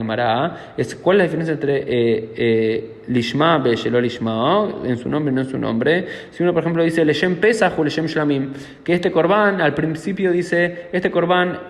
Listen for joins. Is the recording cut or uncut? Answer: uncut